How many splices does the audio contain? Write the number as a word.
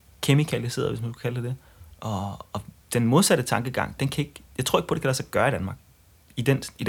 one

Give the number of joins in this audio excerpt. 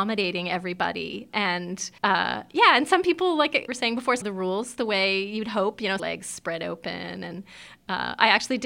five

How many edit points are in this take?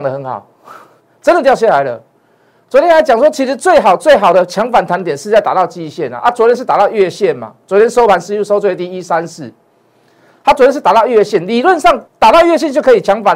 one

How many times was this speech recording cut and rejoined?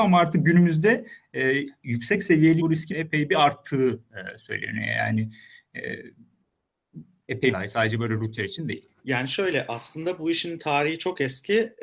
five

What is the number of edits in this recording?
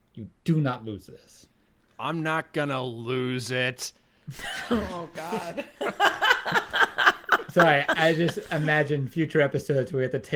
zero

